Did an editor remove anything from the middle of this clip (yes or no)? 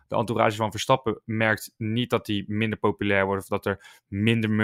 no